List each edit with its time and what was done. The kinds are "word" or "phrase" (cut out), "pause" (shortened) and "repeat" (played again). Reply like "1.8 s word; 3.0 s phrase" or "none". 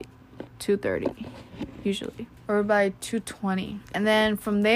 2.4 s pause; 3.8 s pause